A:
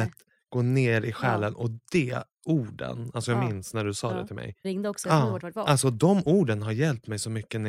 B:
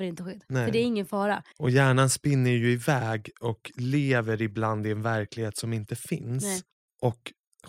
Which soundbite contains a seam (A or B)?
A